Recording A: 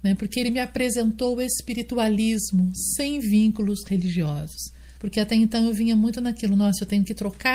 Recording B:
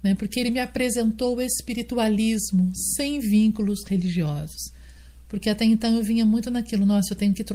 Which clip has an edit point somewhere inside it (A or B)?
A